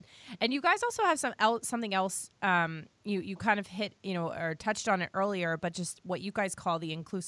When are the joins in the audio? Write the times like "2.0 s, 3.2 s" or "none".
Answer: 2.3 s